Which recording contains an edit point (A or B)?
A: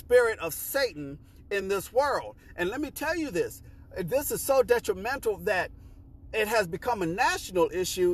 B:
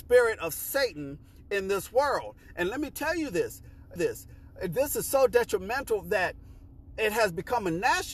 B